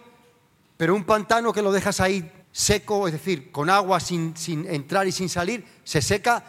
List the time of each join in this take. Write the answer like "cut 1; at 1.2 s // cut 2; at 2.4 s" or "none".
cut 1; at 2.4 s